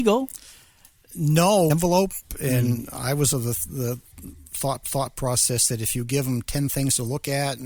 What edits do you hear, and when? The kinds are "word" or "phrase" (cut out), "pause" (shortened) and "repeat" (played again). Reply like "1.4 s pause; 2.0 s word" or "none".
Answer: 1.7 s phrase; 3.3 s word; 4.8 s repeat